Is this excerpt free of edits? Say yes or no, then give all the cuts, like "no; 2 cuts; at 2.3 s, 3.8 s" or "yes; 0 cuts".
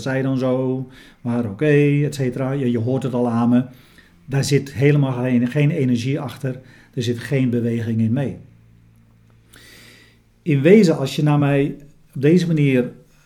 yes; 0 cuts